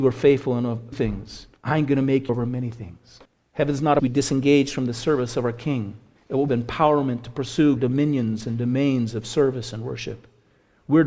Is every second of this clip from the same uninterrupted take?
no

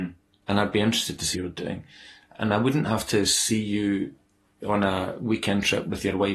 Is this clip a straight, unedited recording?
no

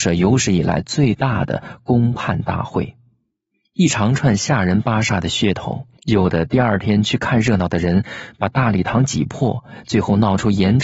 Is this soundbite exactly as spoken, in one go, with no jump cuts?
no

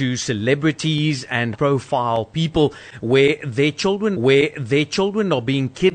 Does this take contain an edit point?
yes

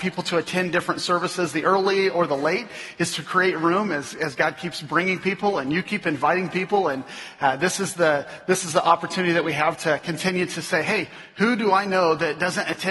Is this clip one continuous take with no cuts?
yes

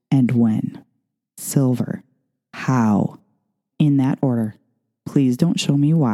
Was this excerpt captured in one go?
no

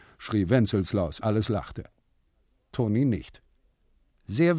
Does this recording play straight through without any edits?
no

